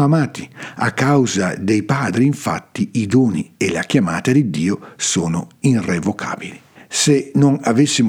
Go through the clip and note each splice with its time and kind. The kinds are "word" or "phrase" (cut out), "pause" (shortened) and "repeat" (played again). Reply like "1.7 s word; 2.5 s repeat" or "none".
6.8 s pause